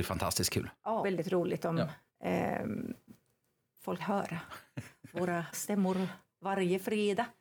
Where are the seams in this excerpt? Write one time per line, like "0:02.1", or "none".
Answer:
0:01.0
0:02.1
0:04.0
0:05.5